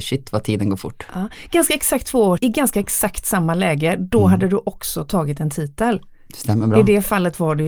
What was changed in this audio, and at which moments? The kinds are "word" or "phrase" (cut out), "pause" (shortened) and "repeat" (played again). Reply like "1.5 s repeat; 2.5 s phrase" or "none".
2.4 s word